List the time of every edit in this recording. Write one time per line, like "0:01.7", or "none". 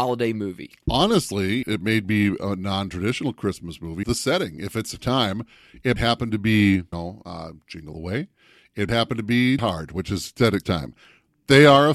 0:01.6
0:04.0
0:05.0
0:06.0
0:06.9
0:07.9
0:08.9
0:09.6
0:10.6

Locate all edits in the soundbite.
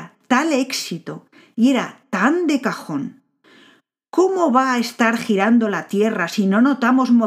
none

